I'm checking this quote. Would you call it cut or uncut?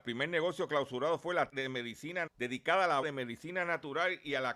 cut